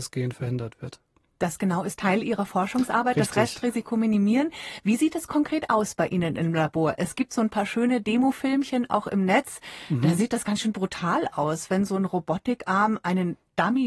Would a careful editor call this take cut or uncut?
uncut